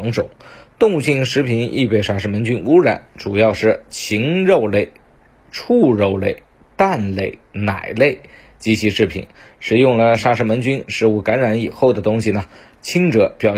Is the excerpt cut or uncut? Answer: uncut